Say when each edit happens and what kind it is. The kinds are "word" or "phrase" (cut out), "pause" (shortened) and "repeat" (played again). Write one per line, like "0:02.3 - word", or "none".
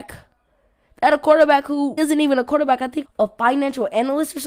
0:02.0 - word
0:03.1 - phrase